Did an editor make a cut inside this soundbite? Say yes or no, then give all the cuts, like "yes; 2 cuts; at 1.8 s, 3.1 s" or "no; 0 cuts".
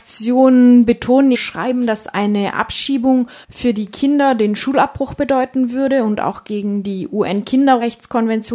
yes; 2 cuts; at 1.3 s, 3.4 s